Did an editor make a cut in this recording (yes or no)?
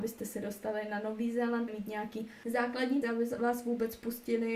yes